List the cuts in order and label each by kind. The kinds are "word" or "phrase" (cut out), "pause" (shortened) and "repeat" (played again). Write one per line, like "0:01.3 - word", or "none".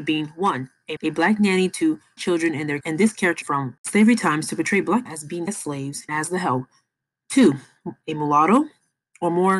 0:01.0 - word
0:02.2 - word
0:02.8 - word
0:03.4 - word
0:05.1 - word
0:05.5 - word
0:06.1 - word